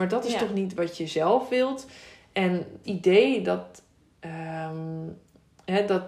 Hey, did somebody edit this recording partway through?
yes; 1 cut; at 2.8 s

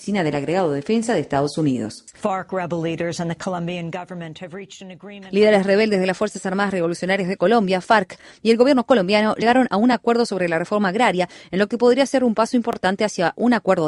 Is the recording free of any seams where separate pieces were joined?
yes; 0 cuts

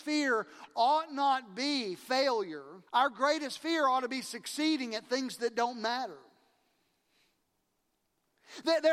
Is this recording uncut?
no; 1 cut; at 2.9 s

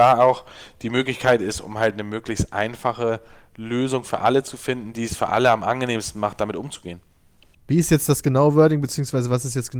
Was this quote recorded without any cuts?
yes; 0 cuts

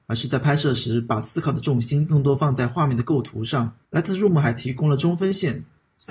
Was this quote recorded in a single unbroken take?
no; 1 cut; at 3.8 s

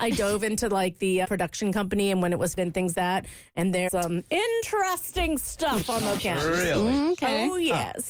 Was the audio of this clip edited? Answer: yes; 5 cuts; at 1.2 s, 2.6 s, 2.9 s, 3.9 s, 6.2 s

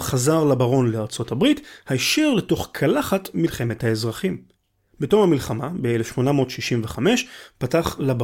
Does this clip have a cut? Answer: no; 0 cuts

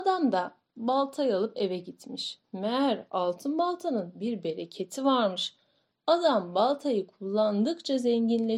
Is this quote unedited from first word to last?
no; 1 cut; at 2.4 s

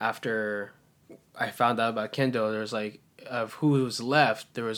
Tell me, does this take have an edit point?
no; 0 cuts

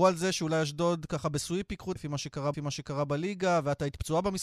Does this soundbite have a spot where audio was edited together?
yes; 2 cuts; at 2.0 s, 2.5 s

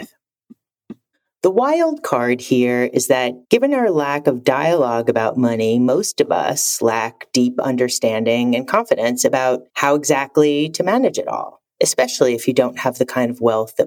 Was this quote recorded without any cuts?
no; 4 cuts; at 1.1 s, 3.4 s, 9.7 s, 11.7 s

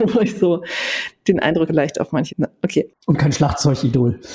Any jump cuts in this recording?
yes; 2 cuts; at 1.7 s, 2.3 s

